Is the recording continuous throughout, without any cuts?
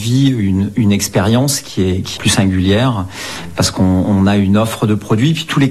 no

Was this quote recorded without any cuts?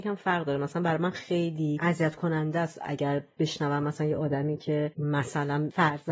yes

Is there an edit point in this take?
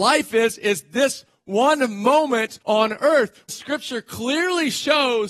yes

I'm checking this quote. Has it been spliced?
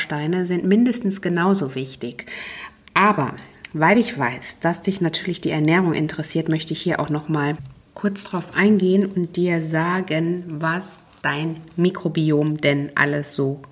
no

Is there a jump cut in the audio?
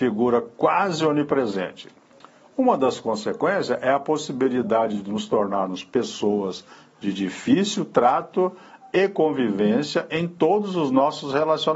no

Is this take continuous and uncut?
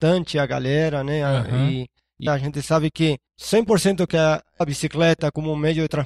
no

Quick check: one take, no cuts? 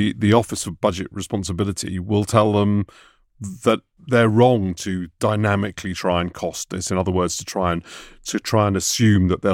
yes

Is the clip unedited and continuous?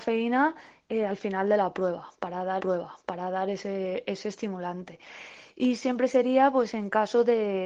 no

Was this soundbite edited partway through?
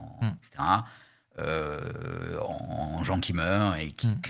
no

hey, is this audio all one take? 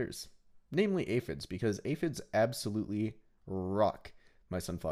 yes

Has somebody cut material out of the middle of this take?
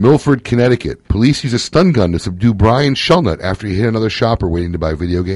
yes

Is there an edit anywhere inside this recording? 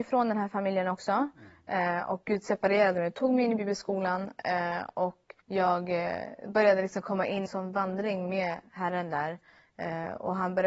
yes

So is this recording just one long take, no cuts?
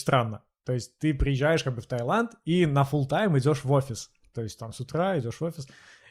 yes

